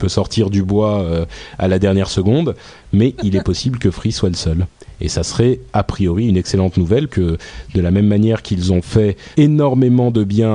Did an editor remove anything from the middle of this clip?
yes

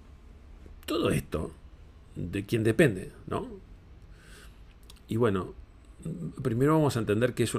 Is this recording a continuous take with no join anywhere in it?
yes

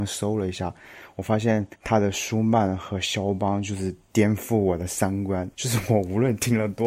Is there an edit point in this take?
yes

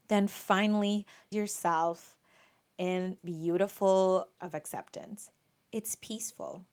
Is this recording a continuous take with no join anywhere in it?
no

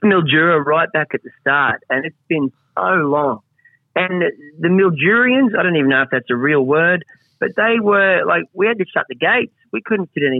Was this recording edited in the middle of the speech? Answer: no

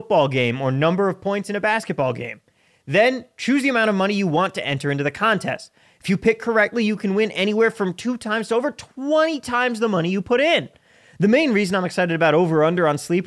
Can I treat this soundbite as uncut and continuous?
yes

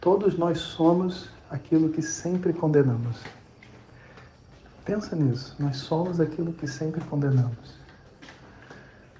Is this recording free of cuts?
yes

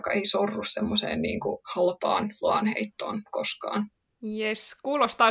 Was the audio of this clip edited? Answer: yes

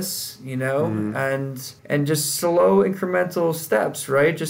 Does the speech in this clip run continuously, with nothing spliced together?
no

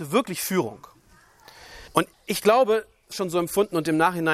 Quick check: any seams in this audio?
yes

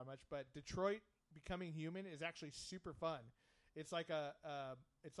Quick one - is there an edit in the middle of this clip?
no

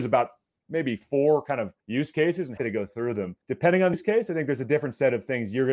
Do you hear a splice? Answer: yes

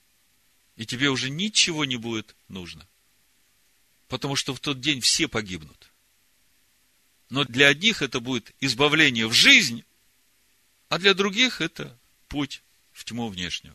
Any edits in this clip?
no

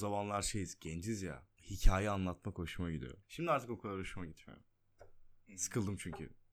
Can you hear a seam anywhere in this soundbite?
yes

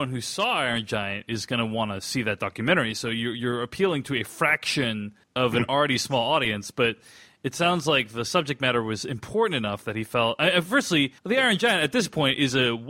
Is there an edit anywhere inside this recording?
yes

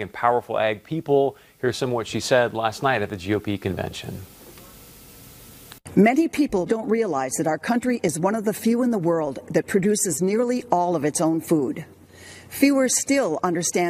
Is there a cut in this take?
yes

